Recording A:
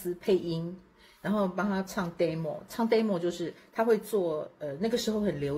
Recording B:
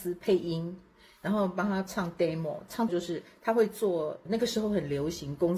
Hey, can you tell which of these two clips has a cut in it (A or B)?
B